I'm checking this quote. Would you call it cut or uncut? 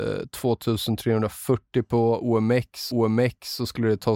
cut